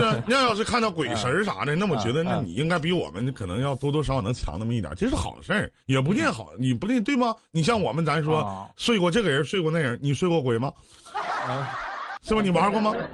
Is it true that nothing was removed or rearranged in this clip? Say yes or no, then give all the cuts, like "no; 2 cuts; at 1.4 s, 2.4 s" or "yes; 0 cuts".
no; 1 cut; at 5.8 s